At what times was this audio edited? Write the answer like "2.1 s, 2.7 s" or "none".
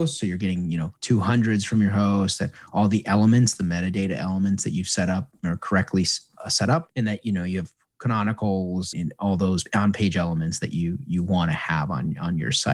8.9 s

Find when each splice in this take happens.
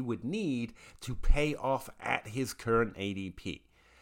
none

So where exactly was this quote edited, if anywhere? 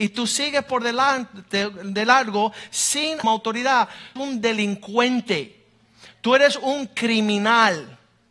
3.2 s, 4.2 s

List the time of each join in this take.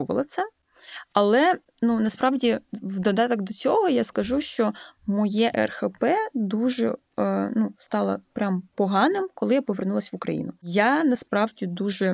none

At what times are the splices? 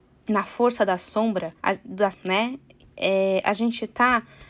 1.6 s, 2.1 s

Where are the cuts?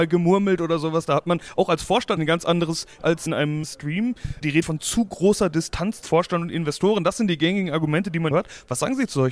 2.2 s, 3.0 s, 4.6 s, 6.0 s, 8.3 s

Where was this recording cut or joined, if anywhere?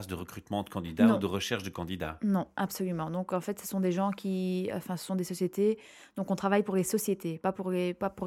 none

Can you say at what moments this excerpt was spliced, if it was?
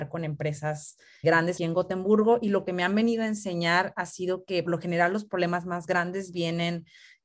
1.2 s, 1.6 s, 4.7 s

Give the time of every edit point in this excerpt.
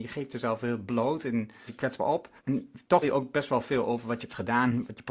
1.7 s, 2.4 s, 3.0 s

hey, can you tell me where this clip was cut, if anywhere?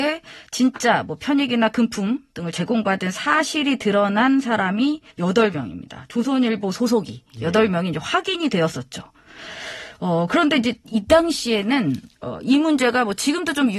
5.1 s, 12.1 s

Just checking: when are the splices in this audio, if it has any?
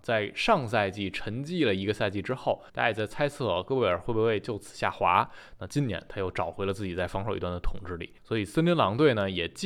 2.7 s, 8.2 s

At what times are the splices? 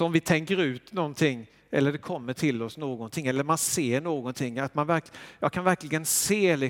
none

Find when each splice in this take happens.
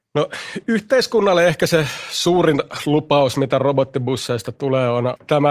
none

